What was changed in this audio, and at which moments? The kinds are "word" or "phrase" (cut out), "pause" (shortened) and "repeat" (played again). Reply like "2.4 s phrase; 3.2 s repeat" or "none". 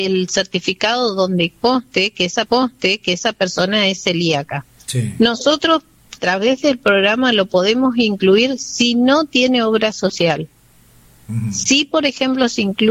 2.5 s repeat; 4.7 s pause; 6.2 s word